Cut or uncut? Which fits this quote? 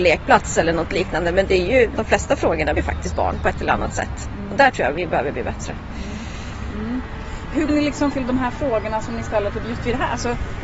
cut